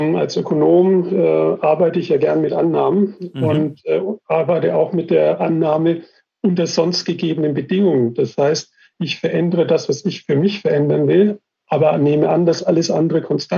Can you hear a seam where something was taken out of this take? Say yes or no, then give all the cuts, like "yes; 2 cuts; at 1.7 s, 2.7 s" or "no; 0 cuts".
no; 0 cuts